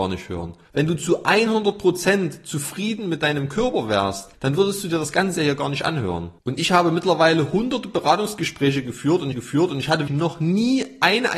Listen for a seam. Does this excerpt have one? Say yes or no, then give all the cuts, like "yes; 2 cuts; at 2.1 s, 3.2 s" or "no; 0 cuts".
yes; 2 cuts; at 9.3 s, 10.1 s